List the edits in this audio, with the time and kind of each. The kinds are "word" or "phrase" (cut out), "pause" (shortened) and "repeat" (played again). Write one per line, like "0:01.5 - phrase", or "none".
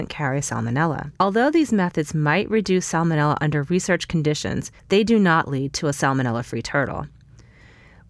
0:01.2 - pause
0:04.8 - pause